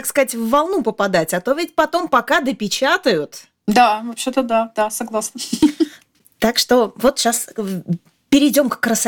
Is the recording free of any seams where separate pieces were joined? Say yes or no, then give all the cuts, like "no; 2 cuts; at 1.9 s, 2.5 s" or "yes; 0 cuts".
yes; 0 cuts